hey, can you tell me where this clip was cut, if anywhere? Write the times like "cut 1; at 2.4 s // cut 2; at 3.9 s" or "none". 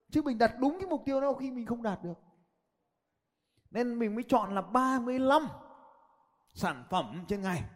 none